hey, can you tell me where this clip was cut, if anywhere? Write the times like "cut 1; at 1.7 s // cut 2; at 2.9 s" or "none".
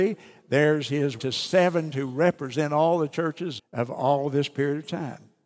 cut 1; at 1.2 s // cut 2; at 1.9 s // cut 3; at 3.6 s